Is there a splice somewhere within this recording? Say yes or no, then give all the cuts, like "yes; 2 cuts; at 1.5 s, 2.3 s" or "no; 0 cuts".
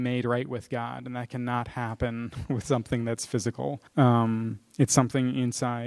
yes; 1 cut; at 3.9 s